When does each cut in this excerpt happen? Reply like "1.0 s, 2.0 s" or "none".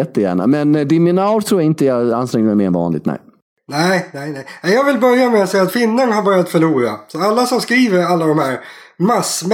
none